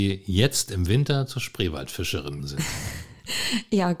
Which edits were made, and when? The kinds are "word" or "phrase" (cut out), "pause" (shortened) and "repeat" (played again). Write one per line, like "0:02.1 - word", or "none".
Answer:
0:02.4 - word